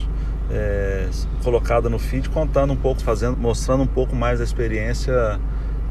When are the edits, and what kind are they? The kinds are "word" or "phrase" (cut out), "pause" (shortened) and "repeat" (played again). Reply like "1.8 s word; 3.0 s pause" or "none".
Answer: 3.0 s word; 3.3 s word